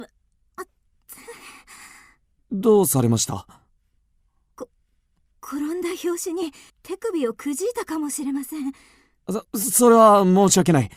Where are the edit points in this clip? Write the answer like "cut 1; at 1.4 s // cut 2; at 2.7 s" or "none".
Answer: cut 1; at 6.7 s // cut 2; at 9.5 s